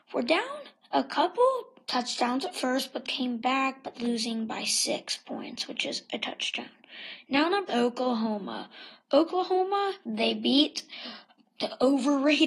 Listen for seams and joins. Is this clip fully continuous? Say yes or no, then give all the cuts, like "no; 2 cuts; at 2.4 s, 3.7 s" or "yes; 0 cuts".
no; 4 cuts; at 3.0 s, 3.9 s, 7.7 s, 10.0 s